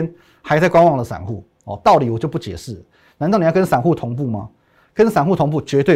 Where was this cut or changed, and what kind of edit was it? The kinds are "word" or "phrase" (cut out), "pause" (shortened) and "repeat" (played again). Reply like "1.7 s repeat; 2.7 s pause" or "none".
none